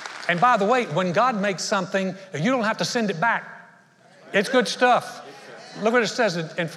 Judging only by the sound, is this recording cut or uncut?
uncut